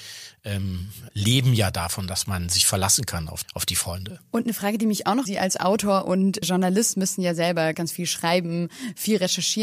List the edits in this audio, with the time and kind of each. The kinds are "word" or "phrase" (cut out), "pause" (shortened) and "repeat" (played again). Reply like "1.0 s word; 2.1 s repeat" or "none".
1.1 s word; 3.4 s word; 5.3 s phrase; 6.4 s word; 7.7 s word